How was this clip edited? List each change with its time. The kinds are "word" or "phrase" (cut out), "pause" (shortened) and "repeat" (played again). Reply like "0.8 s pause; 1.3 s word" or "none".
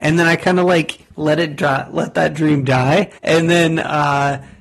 3.2 s pause